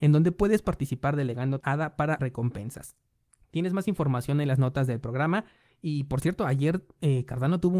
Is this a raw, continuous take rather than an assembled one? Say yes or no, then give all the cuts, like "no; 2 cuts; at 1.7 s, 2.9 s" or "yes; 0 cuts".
no; 2 cuts; at 1.6 s, 2.2 s